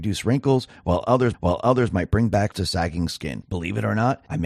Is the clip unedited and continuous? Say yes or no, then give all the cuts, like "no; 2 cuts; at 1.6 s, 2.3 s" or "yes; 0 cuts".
no; 2 cuts; at 1.3 s, 2.5 s